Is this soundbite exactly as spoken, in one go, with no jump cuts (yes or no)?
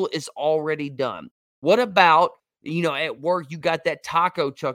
yes